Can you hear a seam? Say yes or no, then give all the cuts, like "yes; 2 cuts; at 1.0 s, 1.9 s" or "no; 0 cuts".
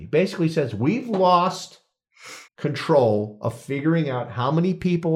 yes; 1 cut; at 2.5 s